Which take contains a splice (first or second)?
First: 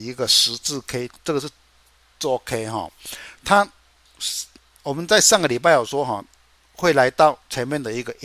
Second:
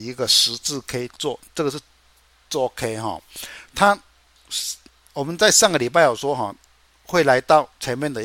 first